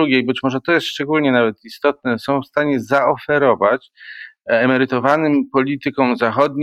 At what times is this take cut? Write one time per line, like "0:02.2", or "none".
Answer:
none